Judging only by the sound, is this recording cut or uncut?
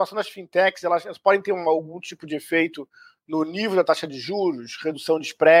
uncut